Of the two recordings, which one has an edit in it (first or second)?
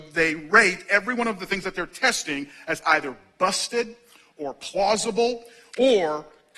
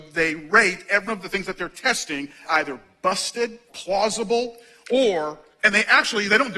second